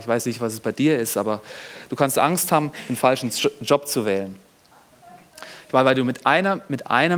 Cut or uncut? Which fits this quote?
uncut